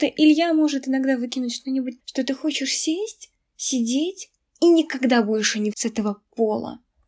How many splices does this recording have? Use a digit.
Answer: 2